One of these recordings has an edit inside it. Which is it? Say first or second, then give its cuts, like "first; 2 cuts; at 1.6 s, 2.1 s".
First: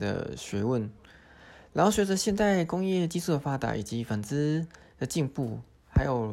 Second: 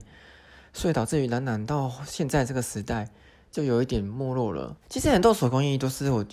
second; 1 cut; at 4.8 s